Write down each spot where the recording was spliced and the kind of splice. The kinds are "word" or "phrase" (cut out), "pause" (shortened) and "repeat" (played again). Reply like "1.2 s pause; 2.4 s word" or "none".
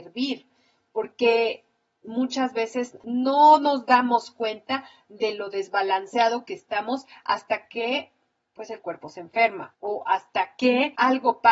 none